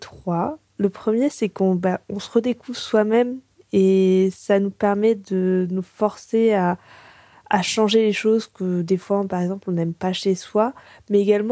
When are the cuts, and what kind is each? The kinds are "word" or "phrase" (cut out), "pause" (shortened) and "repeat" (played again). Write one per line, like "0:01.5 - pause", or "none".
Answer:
none